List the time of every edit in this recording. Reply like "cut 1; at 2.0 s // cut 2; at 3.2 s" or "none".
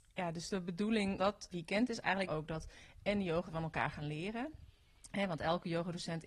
cut 1; at 1.2 s // cut 2; at 1.5 s // cut 3; at 2.3 s // cut 4; at 3.5 s